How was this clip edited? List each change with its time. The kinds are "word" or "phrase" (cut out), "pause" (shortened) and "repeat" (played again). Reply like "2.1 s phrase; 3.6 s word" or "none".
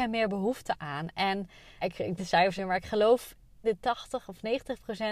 1.8 s word; 2.2 s word; 2.6 s phrase; 3.6 s word